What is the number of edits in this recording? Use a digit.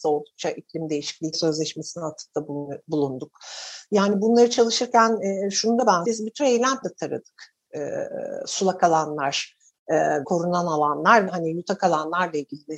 6